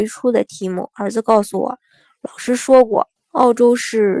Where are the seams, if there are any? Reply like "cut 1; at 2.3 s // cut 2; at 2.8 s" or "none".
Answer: cut 1; at 3.2 s